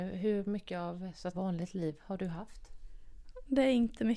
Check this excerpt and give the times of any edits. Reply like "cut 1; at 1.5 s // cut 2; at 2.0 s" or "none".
cut 1; at 1.3 s